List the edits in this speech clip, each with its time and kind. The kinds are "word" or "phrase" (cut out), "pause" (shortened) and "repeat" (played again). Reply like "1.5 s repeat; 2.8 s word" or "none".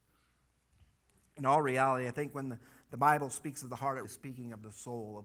1.0 s pause; 4.0 s word